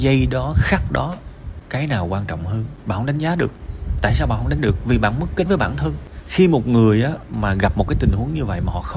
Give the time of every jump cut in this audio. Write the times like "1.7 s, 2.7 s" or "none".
4.6 s, 5.5 s